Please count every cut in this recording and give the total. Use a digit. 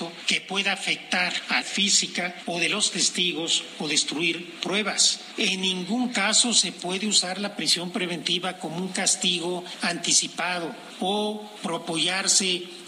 2